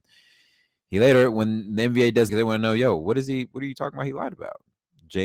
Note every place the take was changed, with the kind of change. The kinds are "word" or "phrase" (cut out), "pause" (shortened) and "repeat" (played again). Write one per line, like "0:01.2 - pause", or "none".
0:02.3 - phrase